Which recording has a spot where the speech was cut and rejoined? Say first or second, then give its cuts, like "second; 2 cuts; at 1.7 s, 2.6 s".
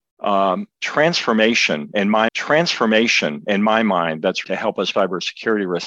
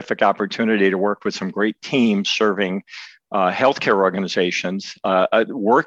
first; 3 cuts; at 2.3 s, 4.4 s, 4.9 s